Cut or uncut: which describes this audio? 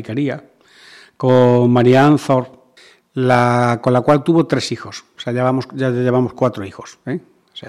cut